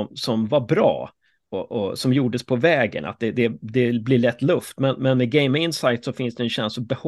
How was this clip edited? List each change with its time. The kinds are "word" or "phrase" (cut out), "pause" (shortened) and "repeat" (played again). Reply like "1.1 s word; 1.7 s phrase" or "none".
none

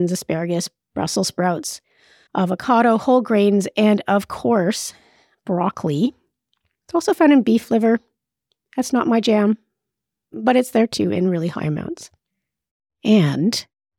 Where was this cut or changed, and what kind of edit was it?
none

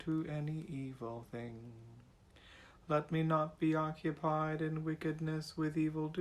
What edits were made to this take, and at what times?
none

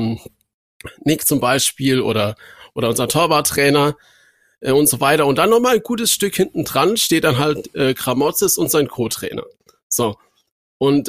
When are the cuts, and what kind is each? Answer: none

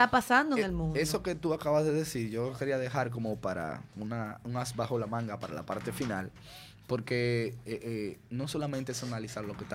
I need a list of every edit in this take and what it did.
none

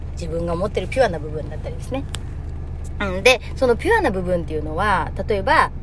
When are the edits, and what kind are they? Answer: none

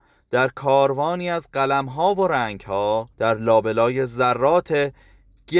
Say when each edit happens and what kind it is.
3.1 s pause

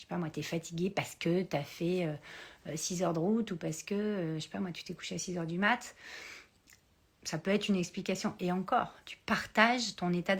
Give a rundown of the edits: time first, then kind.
none

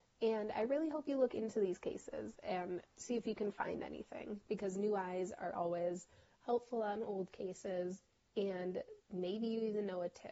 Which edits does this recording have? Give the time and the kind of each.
2.8 s pause; 8.2 s pause

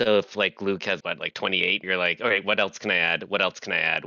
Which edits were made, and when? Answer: 1.0 s word; 1.8 s word

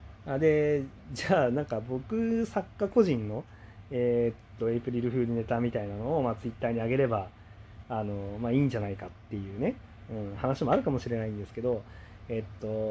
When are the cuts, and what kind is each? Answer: none

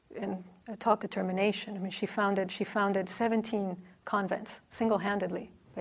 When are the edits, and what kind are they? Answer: 1.0 s word; 2.5 s repeat

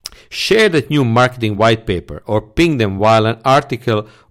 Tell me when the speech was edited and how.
none

